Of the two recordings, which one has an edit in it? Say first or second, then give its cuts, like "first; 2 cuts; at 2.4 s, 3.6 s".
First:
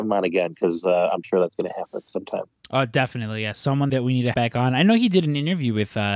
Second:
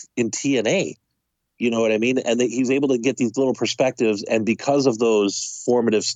first; 3 cuts; at 1.2 s, 3.9 s, 4.3 s